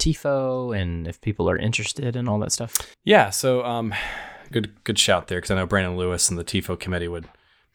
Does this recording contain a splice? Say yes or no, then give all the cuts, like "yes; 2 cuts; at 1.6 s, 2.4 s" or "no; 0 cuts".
yes; 2 cuts; at 2.9 s, 4.5 s